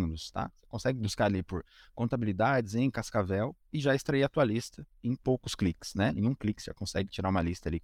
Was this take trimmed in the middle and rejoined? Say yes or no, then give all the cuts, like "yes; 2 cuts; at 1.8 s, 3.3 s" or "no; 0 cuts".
no; 0 cuts